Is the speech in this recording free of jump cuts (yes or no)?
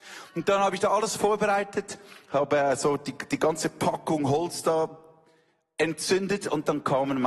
yes